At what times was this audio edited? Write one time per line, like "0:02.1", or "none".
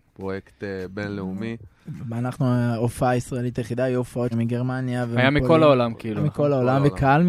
0:04.3